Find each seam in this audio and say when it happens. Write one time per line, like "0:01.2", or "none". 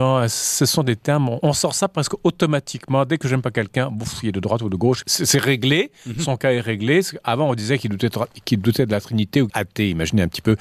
0:01.4
0:05.0
0:09.5